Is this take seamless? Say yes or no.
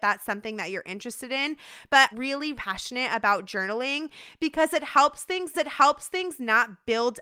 no